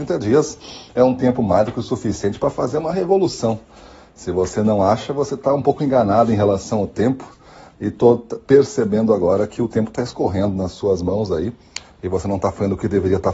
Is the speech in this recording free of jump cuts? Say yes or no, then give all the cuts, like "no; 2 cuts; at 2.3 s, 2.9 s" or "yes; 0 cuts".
yes; 0 cuts